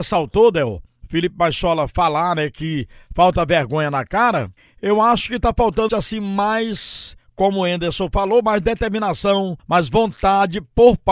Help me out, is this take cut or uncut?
cut